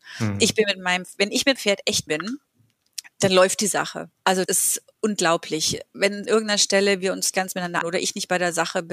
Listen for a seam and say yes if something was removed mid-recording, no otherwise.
yes